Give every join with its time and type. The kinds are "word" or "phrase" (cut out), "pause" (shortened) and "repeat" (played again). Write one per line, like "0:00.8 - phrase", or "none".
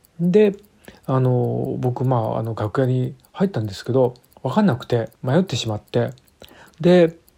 0:04.3 - pause
0:05.1 - pause